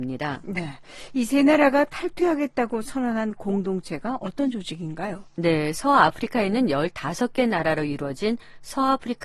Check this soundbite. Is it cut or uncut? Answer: uncut